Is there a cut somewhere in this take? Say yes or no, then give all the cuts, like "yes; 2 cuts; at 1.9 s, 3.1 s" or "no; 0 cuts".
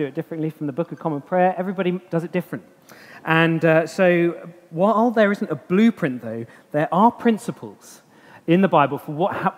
no; 0 cuts